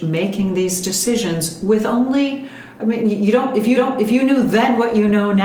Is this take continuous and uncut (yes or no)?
no